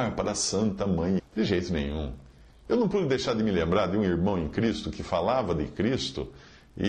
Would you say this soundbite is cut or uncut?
cut